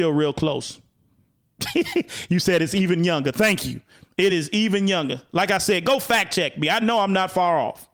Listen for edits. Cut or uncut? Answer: uncut